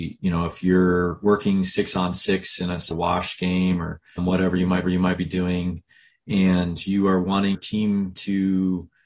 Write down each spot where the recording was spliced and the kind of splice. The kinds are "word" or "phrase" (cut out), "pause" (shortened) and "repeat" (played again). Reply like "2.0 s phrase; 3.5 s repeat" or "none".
2.9 s word; 4.2 s word; 4.8 s repeat; 7.5 s word

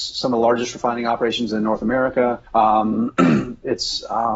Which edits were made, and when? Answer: 2.5 s pause

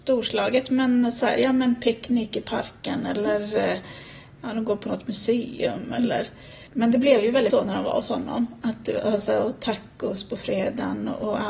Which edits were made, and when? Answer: 6.7 s pause; 7.5 s word

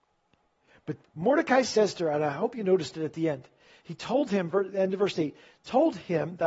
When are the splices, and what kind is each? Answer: 1.0 s word

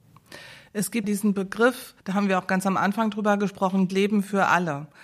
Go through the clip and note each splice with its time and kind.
1.0 s word; 2.0 s pause; 3.9 s word

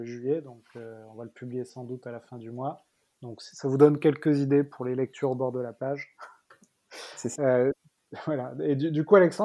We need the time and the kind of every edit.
none

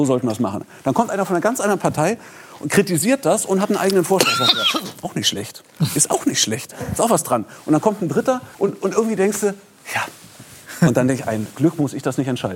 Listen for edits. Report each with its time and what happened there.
8.5 s pause

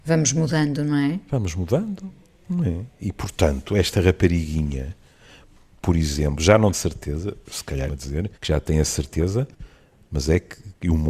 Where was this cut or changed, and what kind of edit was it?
6.7 s phrase; 7.9 s phrase; 8.3 s pause

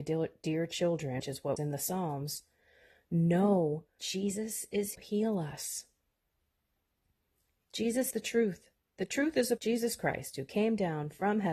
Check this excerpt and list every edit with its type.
1.2 s word; 1.6 s word; 4.0 s word; 4.9 s phrase; 8.1 s word; 8.9 s pause; 9.6 s word

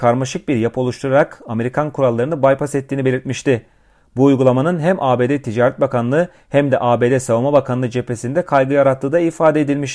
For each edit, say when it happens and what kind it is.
none

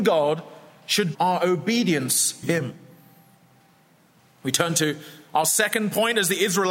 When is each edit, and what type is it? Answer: 1.1 s word; 2.4 s word

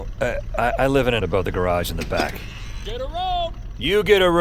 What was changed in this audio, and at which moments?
1.2 s word

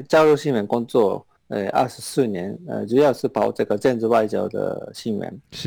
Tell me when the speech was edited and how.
1.4 s pause

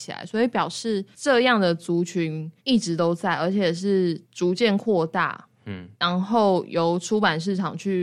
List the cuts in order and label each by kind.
2.6 s pause; 4.2 s pause; 5.9 s pause

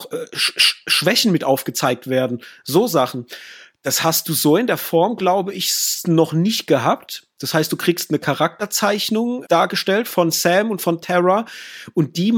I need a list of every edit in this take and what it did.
9.4 s word

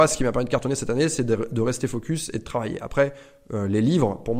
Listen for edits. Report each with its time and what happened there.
none

